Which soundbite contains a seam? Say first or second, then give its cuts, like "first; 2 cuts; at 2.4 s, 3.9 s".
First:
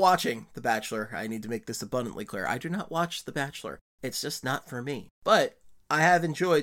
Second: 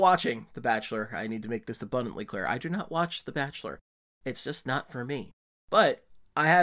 first; 2 cuts; at 3.9 s, 5.1 s